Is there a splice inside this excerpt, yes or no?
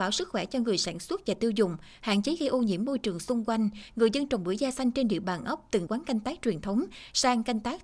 yes